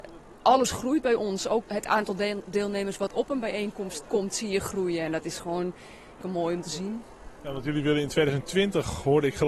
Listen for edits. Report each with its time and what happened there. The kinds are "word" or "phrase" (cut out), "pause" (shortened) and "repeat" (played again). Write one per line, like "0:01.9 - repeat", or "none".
0:01.6 - word
0:04.0 - word
0:06.2 - word